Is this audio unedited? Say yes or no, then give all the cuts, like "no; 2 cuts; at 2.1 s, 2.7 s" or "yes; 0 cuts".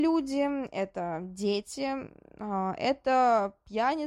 yes; 0 cuts